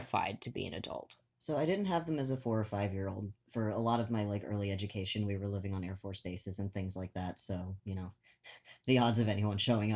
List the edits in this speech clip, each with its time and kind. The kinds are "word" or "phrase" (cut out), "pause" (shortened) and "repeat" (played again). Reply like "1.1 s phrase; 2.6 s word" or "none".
1.3 s pause